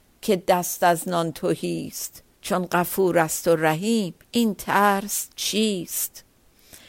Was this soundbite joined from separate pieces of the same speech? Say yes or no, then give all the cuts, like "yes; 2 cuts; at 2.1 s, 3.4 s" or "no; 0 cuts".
yes; 2 cuts; at 2.3 s, 4.2 s